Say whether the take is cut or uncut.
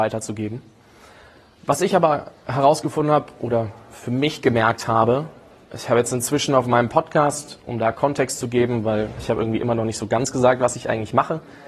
uncut